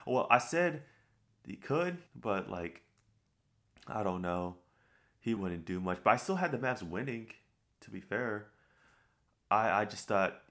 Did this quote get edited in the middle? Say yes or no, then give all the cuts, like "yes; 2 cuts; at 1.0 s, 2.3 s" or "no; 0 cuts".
yes; 2 cuts; at 2.1 s, 5.4 s